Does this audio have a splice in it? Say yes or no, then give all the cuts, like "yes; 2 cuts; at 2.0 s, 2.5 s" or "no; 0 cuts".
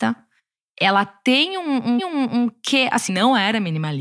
yes; 2 cuts; at 2.0 s, 3.1 s